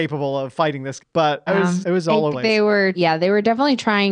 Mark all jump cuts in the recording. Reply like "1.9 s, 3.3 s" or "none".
1.0 s, 1.5 s, 1.8 s, 2.3 s, 2.9 s